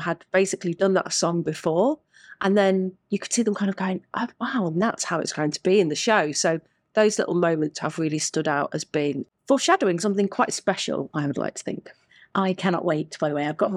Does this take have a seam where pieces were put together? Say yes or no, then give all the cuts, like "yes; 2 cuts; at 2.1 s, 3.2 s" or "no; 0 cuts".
no; 0 cuts